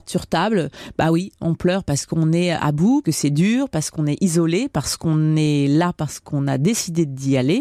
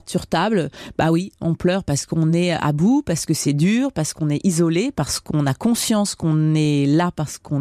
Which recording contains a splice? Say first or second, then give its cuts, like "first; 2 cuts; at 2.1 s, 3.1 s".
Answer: first; 2 cuts; at 3.0 s, 5.0 s